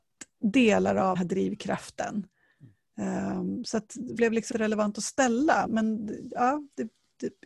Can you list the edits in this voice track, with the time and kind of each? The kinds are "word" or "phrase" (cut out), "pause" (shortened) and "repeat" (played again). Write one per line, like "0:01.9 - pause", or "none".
0:01.2 - word
0:04.2 - word
0:04.5 - word
0:05.7 - word